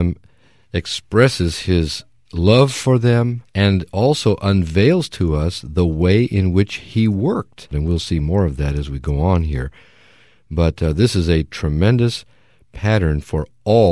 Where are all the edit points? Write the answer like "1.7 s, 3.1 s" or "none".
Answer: 3.5 s